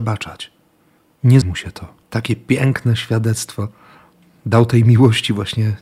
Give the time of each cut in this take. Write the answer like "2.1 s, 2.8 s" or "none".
1.4 s, 2.0 s